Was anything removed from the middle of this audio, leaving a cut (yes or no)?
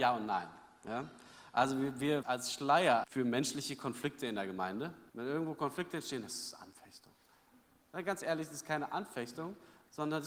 yes